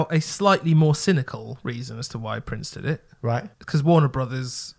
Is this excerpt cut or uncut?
cut